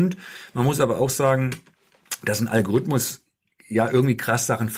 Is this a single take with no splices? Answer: yes; 0 cuts

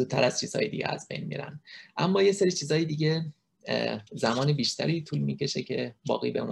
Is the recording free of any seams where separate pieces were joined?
no; 1 cut; at 4.1 s

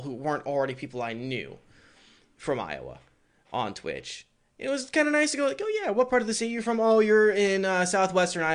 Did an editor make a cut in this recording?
no; 0 cuts

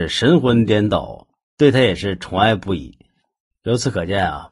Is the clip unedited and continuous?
yes; 0 cuts

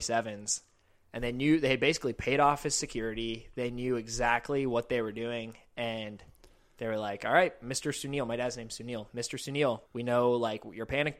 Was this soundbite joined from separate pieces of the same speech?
yes; 1 cut; at 9.9 s

